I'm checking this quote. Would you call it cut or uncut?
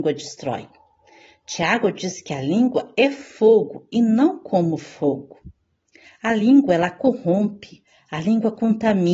uncut